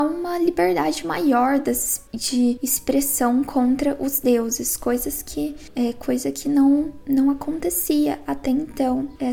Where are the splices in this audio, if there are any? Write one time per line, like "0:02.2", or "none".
none